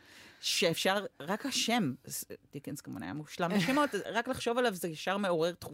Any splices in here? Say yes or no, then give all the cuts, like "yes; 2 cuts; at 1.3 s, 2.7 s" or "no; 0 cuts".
yes; 1 cut; at 4.0 s